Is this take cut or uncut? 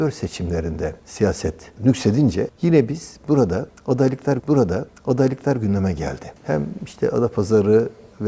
cut